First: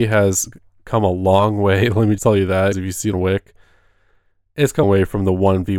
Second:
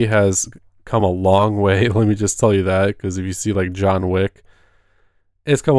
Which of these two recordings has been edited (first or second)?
first